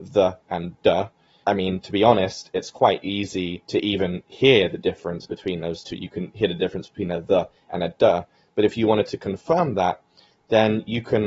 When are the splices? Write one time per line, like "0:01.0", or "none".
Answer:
none